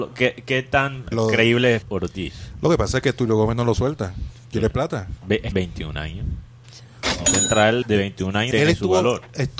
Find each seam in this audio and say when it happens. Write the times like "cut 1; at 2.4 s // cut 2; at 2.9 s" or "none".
cut 1; at 1.1 s // cut 2; at 1.8 s // cut 3; at 5.5 s // cut 4; at 7.8 s // cut 5; at 8.5 s

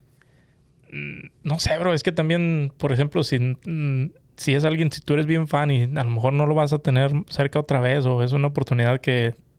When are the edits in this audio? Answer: none

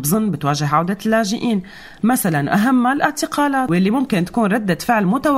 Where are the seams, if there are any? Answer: none

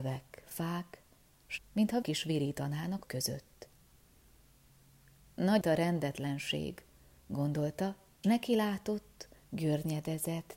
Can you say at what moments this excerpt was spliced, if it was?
cut 1; at 1.6 s // cut 2; at 2.0 s // cut 3; at 3.0 s // cut 4; at 5.6 s // cut 5; at 8.2 s

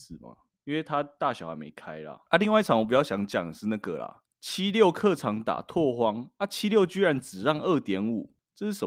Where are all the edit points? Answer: cut 1; at 2.3 s

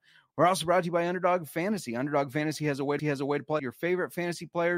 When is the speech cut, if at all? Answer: cut 1; at 3.0 s // cut 2; at 3.6 s

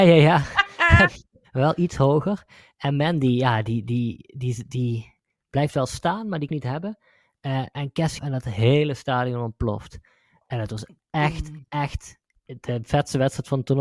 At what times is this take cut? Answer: cut 1; at 6.5 s // cut 2; at 8.2 s

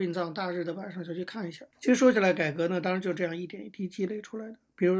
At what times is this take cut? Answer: cut 1; at 1.7 s

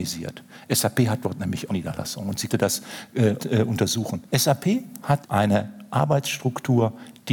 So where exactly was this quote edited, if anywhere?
cut 1; at 1.7 s // cut 2; at 2.5 s // cut 3; at 3.4 s // cut 4; at 4.3 s // cut 5; at 5.2 s

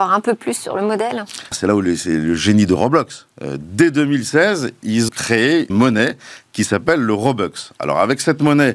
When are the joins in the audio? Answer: cut 1; at 1.5 s // cut 2; at 5.1 s // cut 3; at 5.7 s

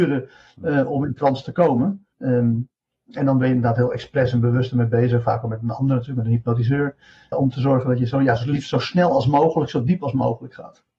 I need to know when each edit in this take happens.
cut 1; at 2.1 s // cut 2; at 7.3 s

